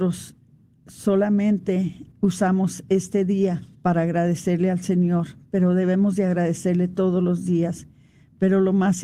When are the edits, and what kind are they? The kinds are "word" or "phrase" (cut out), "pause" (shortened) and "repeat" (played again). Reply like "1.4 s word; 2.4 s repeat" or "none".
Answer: 2.1 s pause; 3.7 s pause